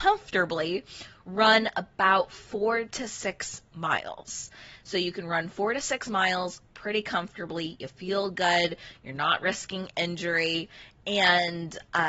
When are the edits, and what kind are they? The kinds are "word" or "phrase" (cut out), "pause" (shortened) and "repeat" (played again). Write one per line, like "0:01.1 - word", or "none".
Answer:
none